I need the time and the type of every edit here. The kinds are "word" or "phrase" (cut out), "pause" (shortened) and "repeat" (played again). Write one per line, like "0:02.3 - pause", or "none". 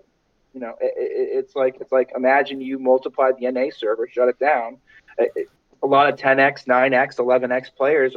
none